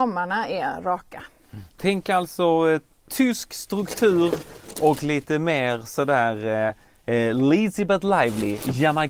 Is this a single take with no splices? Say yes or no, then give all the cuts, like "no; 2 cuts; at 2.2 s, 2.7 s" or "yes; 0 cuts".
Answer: yes; 0 cuts